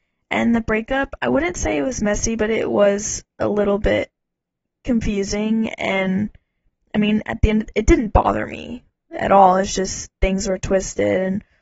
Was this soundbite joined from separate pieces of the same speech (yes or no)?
no